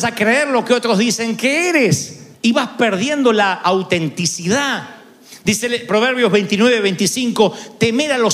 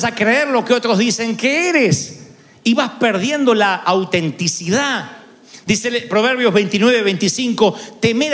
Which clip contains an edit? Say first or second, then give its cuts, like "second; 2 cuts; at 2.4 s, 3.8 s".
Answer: first; 1 cut; at 2.3 s